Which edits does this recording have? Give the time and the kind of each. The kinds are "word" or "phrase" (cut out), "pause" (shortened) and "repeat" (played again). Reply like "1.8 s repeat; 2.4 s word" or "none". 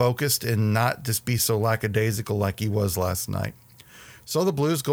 none